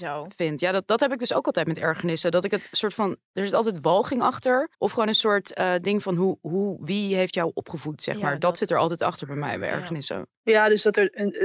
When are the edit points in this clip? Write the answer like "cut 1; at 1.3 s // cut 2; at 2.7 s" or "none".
cut 1; at 4.7 s